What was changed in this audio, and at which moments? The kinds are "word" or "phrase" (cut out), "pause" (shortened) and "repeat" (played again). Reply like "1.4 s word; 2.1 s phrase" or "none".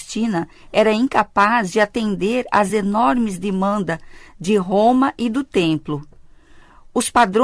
none